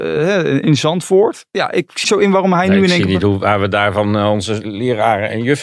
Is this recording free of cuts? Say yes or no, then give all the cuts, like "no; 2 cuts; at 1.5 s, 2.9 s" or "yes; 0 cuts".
no; 1 cut; at 2.0 s